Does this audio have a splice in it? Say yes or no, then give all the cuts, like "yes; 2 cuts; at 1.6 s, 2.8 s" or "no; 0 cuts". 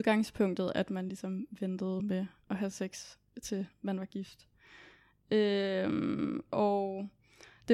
no; 0 cuts